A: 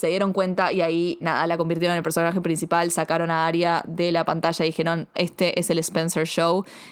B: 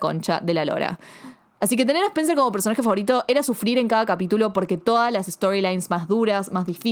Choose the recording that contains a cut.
A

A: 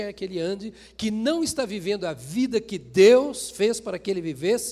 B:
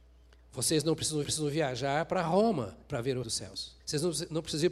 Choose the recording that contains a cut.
B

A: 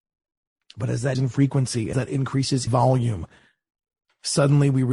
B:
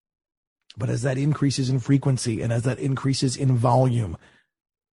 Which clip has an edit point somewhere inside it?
A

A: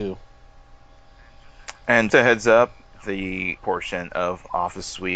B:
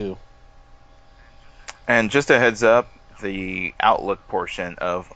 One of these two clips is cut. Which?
A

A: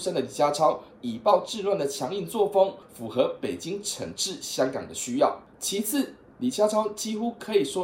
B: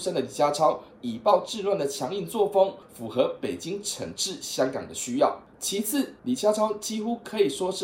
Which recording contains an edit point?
B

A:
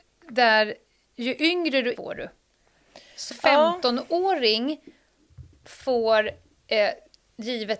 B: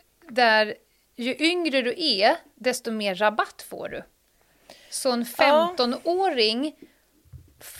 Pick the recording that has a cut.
A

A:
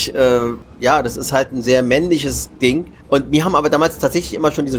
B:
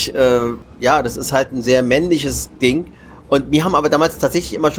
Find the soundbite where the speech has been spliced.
A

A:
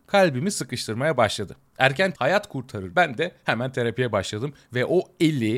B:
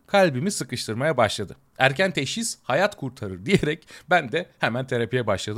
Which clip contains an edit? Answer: A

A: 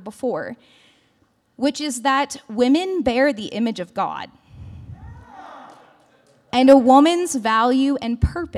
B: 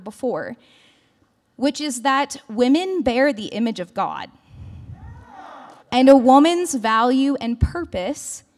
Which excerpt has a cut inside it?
B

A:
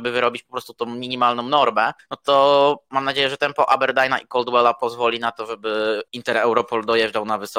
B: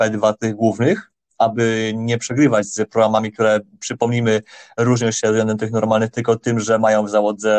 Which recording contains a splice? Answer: A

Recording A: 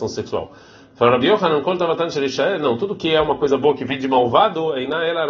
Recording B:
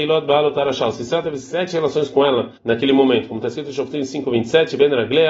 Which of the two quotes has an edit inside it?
B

